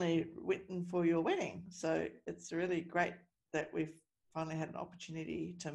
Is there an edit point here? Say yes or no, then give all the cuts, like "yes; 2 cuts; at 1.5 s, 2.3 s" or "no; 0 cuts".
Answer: no; 0 cuts